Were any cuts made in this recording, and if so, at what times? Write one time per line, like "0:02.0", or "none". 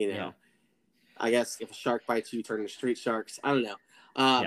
0:01.6